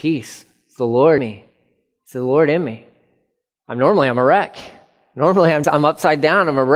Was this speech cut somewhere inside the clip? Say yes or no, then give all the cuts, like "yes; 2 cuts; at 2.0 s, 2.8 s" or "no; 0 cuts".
yes; 2 cuts; at 1.2 s, 5.6 s